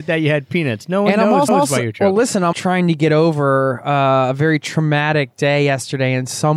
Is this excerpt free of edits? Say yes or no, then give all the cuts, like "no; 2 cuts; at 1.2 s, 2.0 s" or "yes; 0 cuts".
no; 2 cuts; at 1.5 s, 2.5 s